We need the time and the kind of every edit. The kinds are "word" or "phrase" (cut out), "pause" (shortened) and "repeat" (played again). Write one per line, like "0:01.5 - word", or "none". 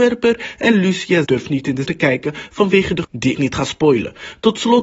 0:01.2 - word
0:01.8 - word
0:03.0 - word
0:03.3 - word